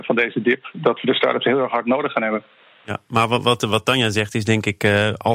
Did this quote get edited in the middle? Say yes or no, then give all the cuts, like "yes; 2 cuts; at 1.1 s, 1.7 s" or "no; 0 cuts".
no; 0 cuts